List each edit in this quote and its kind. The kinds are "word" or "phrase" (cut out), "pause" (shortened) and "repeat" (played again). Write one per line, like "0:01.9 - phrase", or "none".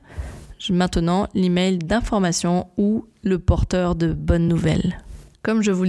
none